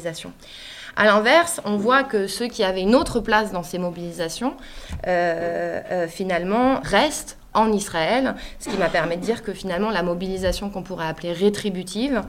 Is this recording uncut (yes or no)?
no